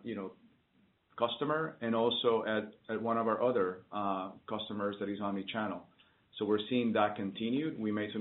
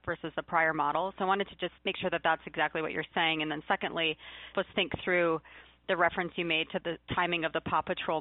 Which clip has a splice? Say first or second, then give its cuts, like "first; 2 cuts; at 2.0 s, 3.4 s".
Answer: second; 3 cuts; at 1.8 s, 4.5 s, 6.8 s